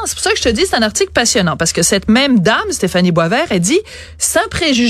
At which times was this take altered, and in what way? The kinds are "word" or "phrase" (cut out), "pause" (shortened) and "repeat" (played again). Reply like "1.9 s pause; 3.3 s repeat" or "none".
none